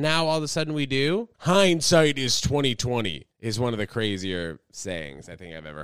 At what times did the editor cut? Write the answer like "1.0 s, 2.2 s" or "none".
1.3 s, 3.3 s